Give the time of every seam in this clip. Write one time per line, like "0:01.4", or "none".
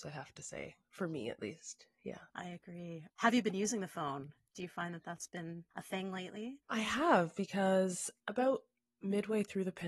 0:02.3
0:03.1
0:05.7
0:06.6
0:08.2